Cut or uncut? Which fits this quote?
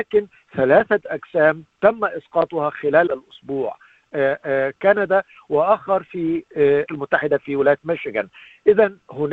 cut